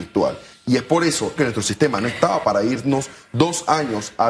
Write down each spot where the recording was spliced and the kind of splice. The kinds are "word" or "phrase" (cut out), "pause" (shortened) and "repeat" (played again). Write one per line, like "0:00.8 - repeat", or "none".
0:01.4 - word
0:02.4 - word